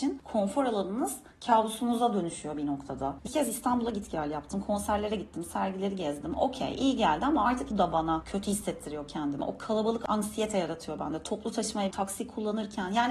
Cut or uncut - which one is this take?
cut